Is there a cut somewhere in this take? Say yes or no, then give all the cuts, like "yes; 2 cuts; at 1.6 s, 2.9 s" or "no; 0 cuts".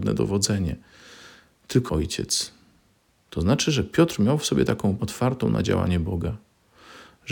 yes; 2 cuts; at 1.9 s, 5.0 s